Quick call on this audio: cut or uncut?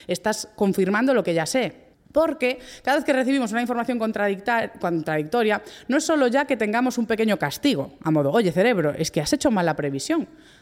cut